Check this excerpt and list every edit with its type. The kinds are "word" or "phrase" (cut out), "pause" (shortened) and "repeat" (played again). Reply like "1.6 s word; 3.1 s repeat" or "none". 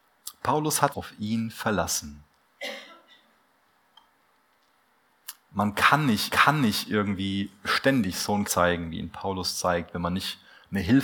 0.9 s word; 6.3 s repeat; 8.4 s word